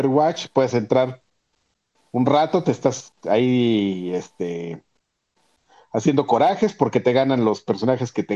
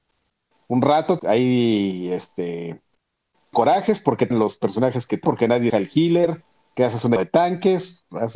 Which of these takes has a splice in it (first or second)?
second